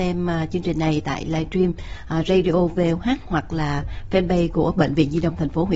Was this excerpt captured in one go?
yes; 0 cuts

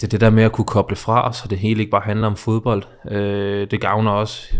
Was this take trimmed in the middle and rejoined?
no; 0 cuts

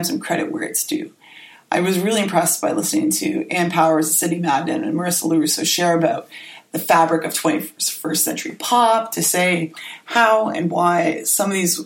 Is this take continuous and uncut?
yes; 0 cuts

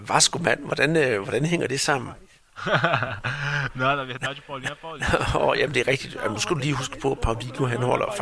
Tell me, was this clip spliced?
no; 0 cuts

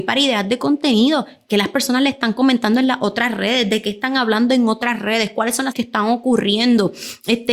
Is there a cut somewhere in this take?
yes; 1 cut; at 5.7 s

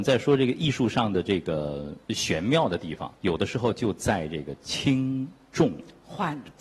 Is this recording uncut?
no; 2 cuts; at 2.0 s, 3.2 s

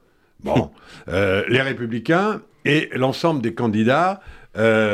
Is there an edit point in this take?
no; 0 cuts

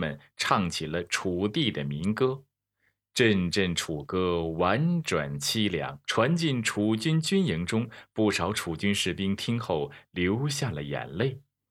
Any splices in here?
yes; 1 cut; at 6.0 s

